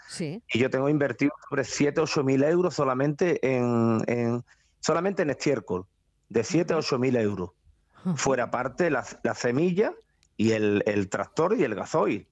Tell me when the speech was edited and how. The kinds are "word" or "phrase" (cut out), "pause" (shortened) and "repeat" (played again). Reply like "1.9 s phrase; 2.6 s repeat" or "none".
none